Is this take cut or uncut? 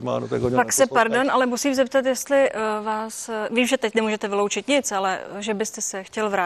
uncut